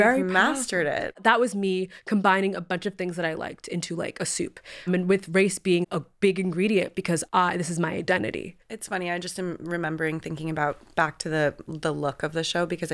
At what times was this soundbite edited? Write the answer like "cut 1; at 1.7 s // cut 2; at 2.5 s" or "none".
cut 1; at 4.9 s // cut 2; at 7.2 s // cut 3; at 8.6 s // cut 4; at 10.9 s